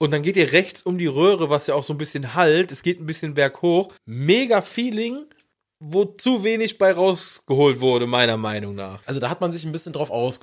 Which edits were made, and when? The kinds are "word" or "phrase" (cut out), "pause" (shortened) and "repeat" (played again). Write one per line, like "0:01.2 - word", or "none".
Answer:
0:04.0 - pause
0:05.5 - pause
0:09.0 - pause